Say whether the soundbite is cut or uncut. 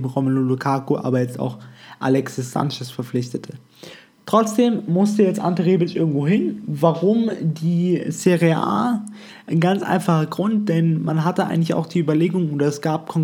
uncut